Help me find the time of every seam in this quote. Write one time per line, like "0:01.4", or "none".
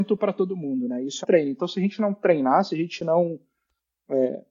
0:01.2